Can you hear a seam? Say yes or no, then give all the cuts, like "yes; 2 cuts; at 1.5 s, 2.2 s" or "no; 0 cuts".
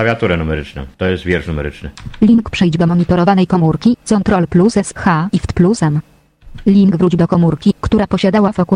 yes; 1 cut; at 0.9 s